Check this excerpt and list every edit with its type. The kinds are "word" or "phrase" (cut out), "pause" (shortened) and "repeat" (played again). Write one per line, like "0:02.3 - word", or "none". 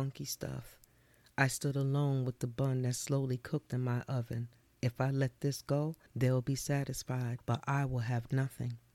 none